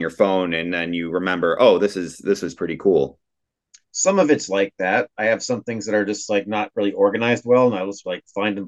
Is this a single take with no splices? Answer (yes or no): yes